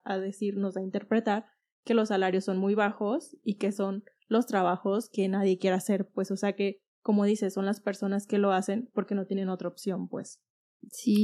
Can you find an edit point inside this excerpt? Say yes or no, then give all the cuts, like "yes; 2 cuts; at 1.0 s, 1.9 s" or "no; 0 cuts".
no; 0 cuts